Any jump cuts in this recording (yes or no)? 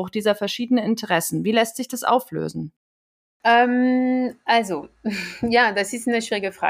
no